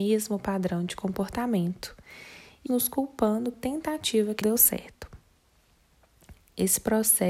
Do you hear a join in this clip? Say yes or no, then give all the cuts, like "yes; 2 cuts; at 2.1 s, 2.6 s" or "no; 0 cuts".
yes; 3 cuts; at 2.7 s, 3.5 s, 4.4 s